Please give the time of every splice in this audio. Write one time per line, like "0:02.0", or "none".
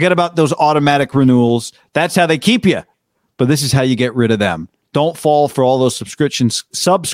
none